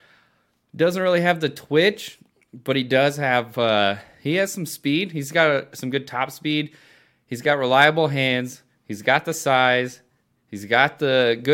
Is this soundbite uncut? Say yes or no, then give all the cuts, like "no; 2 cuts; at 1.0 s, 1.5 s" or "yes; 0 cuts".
yes; 0 cuts